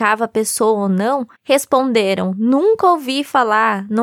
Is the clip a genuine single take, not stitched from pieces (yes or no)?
no